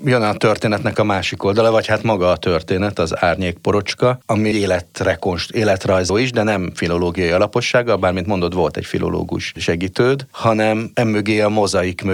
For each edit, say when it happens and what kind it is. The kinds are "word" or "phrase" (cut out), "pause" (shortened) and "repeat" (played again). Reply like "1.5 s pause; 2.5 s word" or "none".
4.5 s word; 6.1 s word

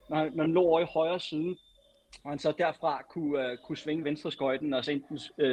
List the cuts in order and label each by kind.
4.0 s word

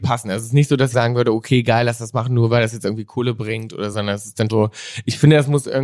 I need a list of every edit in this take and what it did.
0.9 s phrase; 3.9 s word; 4.5 s word

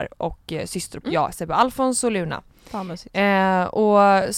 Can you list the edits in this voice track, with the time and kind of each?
1.0 s word

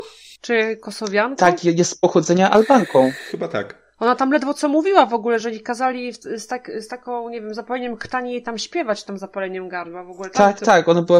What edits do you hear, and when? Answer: none

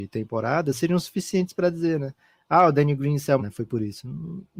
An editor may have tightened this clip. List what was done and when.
3.4 s word

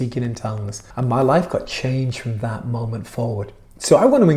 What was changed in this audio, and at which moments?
0.9 s pause

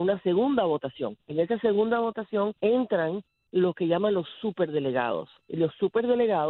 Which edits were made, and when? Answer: 1.2 s pause; 2.6 s pause

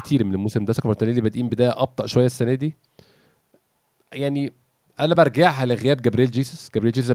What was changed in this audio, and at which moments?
none

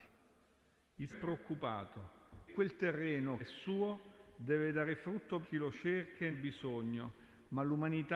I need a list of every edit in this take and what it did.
1.1 s word; 2.5 s word; 3.4 s word; 5.4 s word; 6.3 s word

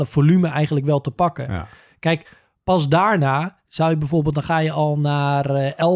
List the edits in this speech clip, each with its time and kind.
none

